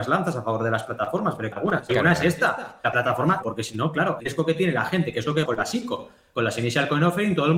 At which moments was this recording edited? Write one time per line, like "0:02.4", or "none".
0:01.5
0:03.4
0:04.2
0:05.4